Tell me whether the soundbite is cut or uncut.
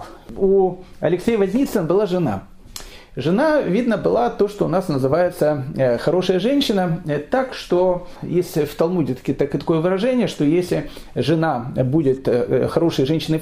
uncut